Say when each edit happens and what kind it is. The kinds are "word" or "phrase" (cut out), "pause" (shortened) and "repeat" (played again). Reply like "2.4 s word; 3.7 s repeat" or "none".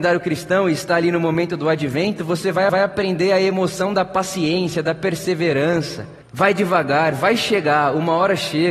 2.7 s repeat; 6.2 s pause